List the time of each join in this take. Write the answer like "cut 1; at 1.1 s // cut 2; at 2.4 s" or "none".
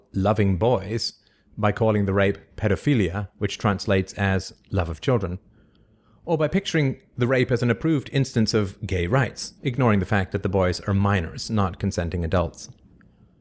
cut 1; at 9.6 s